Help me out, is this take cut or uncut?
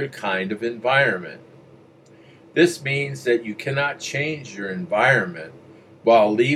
uncut